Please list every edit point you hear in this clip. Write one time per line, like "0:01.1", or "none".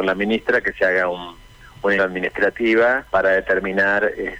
0:02.0
0:03.1